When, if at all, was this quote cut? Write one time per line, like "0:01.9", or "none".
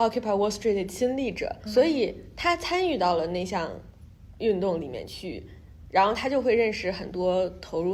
0:01.7